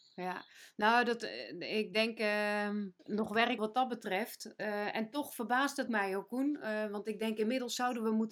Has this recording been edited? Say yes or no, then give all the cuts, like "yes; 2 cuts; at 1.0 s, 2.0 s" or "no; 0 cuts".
yes; 3 cuts; at 3.0 s, 3.6 s, 5.9 s